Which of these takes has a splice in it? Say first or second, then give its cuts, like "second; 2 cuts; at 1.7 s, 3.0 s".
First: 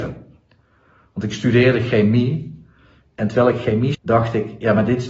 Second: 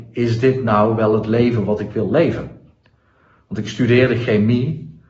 first; 1 cut; at 3.9 s